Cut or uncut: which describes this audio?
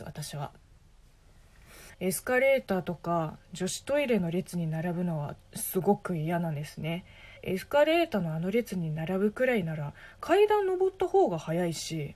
cut